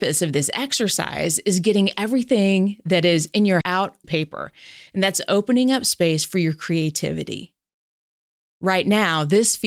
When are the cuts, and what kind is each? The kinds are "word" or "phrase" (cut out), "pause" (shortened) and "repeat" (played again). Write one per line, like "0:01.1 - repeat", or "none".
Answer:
0:03.6 - word
0:04.0 - word